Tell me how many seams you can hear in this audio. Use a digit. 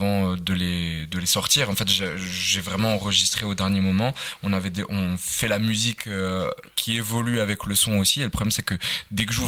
0